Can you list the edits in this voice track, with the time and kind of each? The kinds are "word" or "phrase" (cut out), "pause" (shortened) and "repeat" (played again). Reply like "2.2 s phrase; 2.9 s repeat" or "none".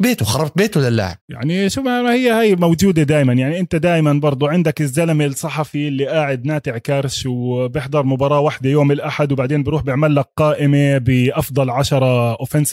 1.2 s pause